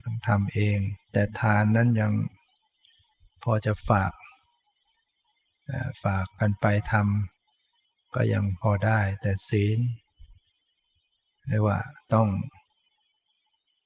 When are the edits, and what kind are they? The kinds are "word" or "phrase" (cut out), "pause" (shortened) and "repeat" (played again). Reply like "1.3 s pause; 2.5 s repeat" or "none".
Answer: 1.0 s pause; 7.4 s pause